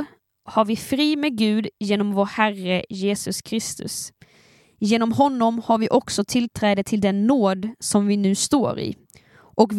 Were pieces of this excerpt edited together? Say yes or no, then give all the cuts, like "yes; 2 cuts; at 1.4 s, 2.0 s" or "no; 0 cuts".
no; 0 cuts